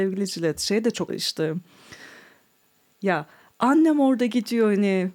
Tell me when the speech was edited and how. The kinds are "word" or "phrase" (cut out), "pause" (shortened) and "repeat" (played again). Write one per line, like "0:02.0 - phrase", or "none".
0:01.1 - word